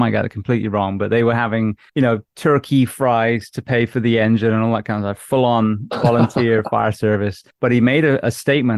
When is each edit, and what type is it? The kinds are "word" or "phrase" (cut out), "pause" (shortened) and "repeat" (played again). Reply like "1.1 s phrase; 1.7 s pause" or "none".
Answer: 1.9 s pause; 7.5 s pause